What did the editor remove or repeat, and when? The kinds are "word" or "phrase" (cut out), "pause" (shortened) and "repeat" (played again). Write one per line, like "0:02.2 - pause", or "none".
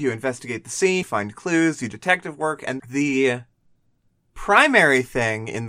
0:01.0 - word
0:01.9 - word
0:02.8 - word